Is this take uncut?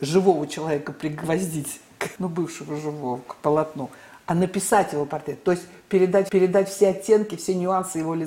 no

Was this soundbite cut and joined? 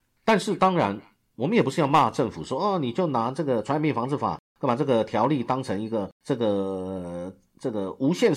yes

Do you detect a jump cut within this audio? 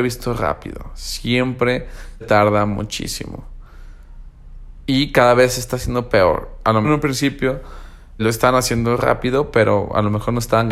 yes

